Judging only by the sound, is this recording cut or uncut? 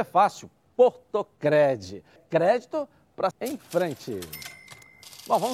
cut